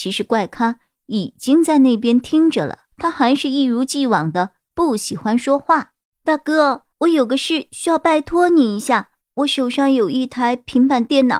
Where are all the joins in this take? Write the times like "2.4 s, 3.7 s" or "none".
2.9 s, 6.0 s, 6.9 s, 9.2 s

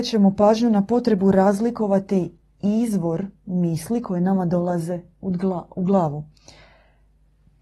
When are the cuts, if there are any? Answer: none

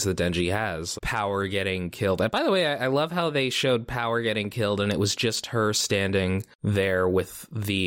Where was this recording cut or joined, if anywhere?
1.0 s

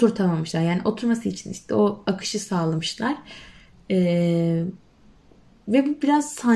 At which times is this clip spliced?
none

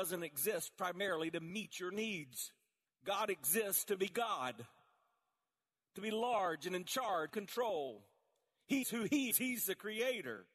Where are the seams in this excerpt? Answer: 2.9 s, 7.3 s, 8.8 s, 9.3 s

